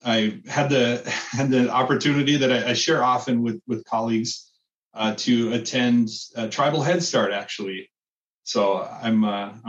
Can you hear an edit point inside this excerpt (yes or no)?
no